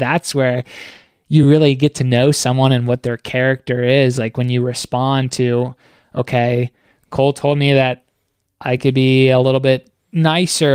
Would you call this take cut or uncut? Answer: uncut